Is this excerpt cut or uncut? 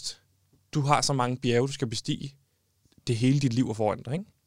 uncut